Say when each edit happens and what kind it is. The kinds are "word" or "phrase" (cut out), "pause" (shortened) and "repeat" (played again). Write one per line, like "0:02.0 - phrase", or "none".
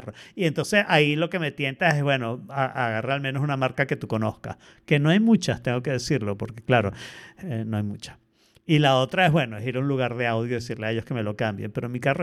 none